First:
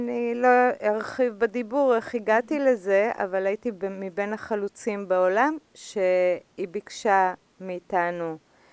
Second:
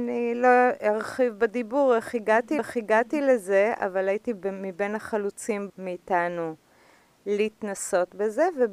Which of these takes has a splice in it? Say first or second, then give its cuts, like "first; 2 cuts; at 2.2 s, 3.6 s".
second; 2 cuts; at 2.6 s, 5.7 s